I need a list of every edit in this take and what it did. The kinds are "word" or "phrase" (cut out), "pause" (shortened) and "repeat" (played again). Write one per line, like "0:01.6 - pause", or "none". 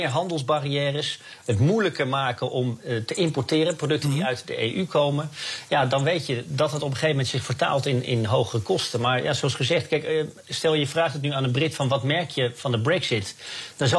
0:10.4 - pause